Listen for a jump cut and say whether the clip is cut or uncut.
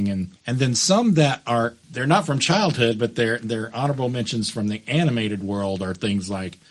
uncut